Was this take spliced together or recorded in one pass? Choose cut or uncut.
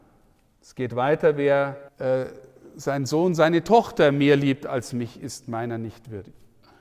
cut